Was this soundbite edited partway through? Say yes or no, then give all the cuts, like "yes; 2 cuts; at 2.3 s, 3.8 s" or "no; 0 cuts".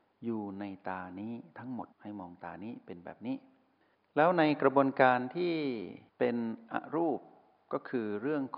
yes; 3 cuts; at 1.9 s, 3.8 s, 6.1 s